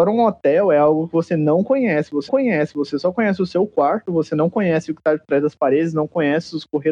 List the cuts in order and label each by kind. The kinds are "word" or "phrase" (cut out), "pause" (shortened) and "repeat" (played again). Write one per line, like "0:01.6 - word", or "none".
0:02.3 - repeat